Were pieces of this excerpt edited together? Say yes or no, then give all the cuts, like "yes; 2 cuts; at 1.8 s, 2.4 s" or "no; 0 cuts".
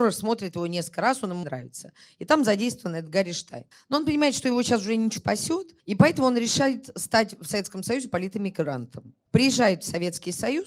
yes; 5 cuts; at 1.4 s, 3.7 s, 5.2 s, 5.8 s, 9.3 s